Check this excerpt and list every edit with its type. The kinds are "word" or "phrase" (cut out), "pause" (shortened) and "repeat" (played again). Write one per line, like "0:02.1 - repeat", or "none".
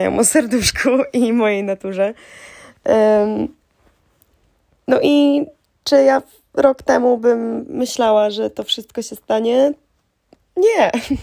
none